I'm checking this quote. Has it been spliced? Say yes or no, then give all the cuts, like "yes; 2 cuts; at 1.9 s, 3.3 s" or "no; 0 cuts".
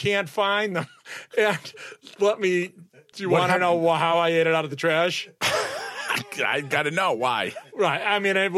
no; 0 cuts